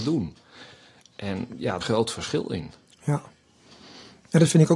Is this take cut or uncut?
cut